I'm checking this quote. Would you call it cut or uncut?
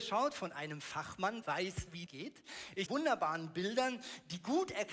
cut